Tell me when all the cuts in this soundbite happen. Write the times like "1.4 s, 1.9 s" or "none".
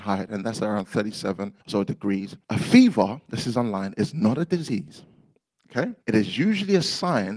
1.6 s, 2.4 s, 6.0 s